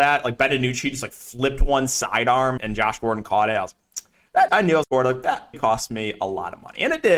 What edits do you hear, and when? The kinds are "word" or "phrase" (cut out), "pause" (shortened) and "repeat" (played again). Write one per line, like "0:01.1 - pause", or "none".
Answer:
0:02.6 - word
0:04.5 - word
0:04.8 - word
0:05.5 - word